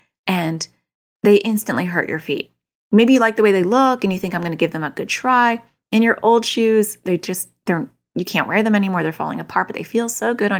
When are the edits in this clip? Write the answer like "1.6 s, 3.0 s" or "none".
none